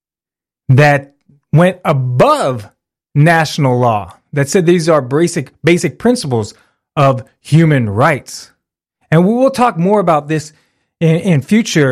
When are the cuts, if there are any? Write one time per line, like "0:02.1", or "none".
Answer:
none